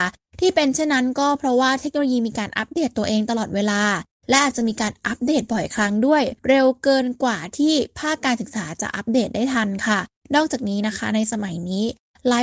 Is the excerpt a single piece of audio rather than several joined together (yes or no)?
no